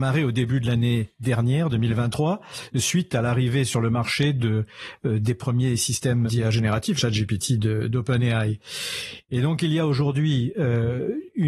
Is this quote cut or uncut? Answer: cut